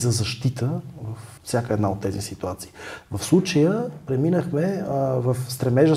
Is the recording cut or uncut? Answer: cut